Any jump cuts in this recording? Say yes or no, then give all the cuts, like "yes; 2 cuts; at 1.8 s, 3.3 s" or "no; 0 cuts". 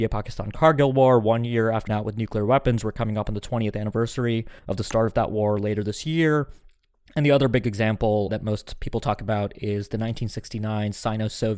yes; 3 cuts; at 1.9 s, 4.6 s, 8.3 s